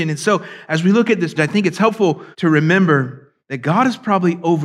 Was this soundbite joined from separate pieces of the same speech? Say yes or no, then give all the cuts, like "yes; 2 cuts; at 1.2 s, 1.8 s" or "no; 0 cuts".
yes; 3 cuts; at 1.4 s, 2.3 s, 3.4 s